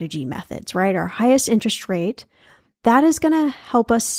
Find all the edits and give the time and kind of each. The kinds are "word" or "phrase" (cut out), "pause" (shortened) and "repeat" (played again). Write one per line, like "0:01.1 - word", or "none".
none